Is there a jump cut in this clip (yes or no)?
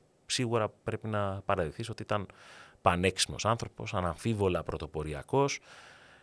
no